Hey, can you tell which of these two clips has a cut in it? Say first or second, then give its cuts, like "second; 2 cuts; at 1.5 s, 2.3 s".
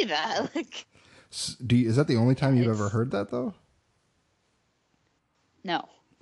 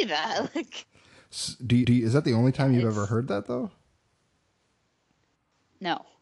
second; 1 cut; at 1.8 s